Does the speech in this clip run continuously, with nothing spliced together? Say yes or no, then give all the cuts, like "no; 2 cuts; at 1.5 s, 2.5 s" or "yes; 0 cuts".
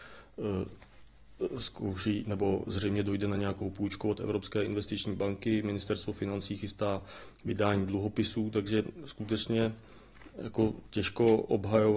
yes; 0 cuts